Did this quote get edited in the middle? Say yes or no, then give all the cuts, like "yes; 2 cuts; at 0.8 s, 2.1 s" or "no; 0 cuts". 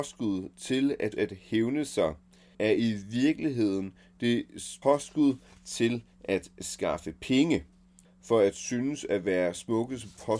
yes; 4 cuts; at 1.1 s, 2.5 s, 4.8 s, 8.0 s